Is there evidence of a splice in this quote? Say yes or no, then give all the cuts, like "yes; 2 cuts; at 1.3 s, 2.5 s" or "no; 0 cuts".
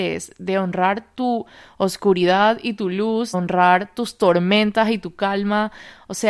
yes; 1 cut; at 3.3 s